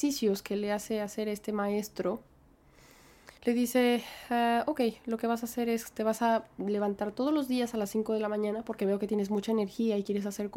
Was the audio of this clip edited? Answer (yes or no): yes